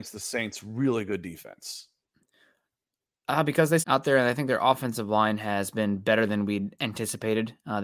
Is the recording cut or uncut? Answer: cut